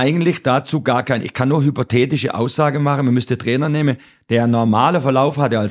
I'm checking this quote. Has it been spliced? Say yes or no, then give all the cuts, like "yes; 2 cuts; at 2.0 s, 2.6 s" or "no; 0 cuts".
no; 0 cuts